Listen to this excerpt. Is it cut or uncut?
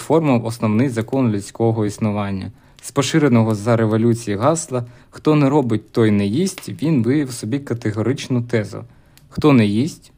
uncut